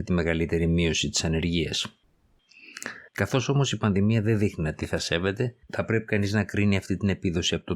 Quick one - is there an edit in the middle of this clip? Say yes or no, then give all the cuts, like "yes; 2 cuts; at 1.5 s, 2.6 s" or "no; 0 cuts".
yes; 2 cuts; at 3.1 s, 5.6 s